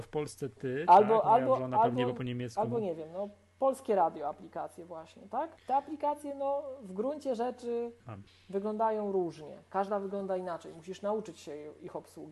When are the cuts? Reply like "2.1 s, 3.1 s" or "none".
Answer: 5.6 s, 8.0 s